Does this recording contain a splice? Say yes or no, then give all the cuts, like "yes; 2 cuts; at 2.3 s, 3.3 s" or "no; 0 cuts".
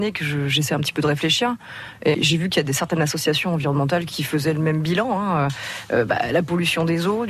yes; 1 cut; at 2.1 s